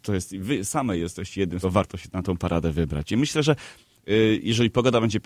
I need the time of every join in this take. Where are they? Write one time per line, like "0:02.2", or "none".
0:01.6